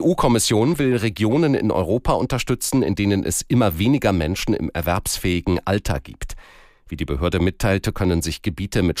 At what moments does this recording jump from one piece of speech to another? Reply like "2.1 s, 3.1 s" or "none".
none

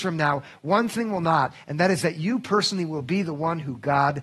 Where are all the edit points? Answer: none

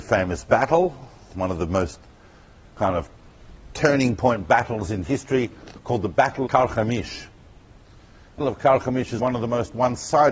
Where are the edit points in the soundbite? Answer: 6.5 s, 8.4 s, 9.2 s

